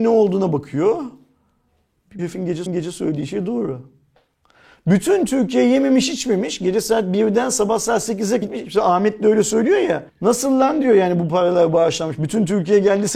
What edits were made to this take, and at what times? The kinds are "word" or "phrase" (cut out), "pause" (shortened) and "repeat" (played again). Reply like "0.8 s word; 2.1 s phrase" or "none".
2.2 s word; 2.7 s repeat; 8.4 s phrase; 10.1 s pause